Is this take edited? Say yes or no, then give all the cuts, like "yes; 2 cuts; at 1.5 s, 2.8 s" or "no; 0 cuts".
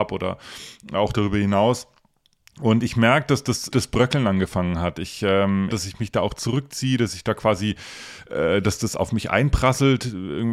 yes; 2 cuts; at 3.7 s, 5.7 s